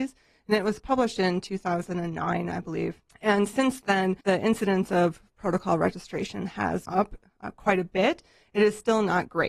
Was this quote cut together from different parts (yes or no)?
yes